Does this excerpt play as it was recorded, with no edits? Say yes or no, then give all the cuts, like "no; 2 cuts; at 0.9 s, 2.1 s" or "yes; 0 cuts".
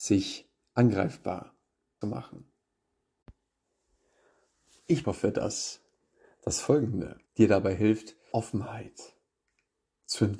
no; 4 cuts; at 2.0 s, 5.0 s, 7.3 s, 8.3 s